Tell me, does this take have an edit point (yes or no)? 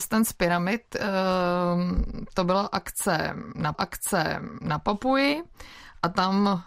yes